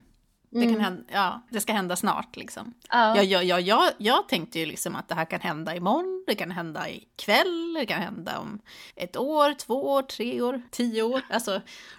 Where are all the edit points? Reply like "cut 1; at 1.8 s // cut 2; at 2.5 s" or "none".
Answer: cut 1; at 1.5 s // cut 2; at 2.8 s // cut 3; at 8.9 s // cut 4; at 10.7 s